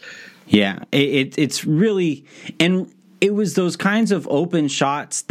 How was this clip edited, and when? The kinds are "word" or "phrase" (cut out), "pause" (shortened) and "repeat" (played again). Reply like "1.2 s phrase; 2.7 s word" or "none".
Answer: none

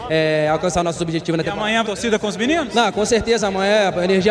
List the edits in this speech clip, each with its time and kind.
1.8 s phrase

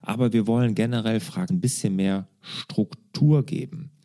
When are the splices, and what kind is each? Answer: 1.5 s word

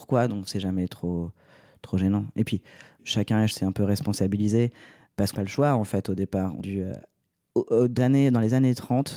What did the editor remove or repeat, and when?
3.5 s word; 5.3 s word; 6.6 s word; 8.0 s word

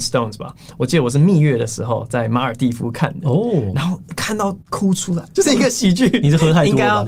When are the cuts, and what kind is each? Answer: 4.6 s pause; 5.3 s word

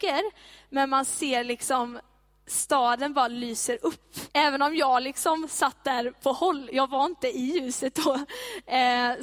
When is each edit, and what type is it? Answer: 4.3 s pause

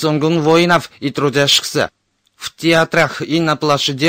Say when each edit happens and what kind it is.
none

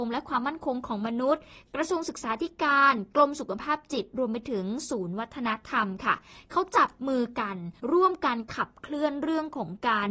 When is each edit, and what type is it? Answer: 7.8 s pause

